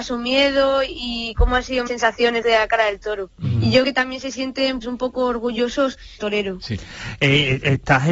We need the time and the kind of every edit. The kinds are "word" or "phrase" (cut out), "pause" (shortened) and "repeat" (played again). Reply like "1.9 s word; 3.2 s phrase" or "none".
1.3 s word; 1.9 s word; 2.4 s word; 3.3 s pause; 3.8 s word; 4.8 s word; 6.2 s phrase